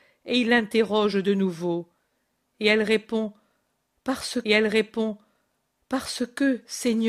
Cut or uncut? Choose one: cut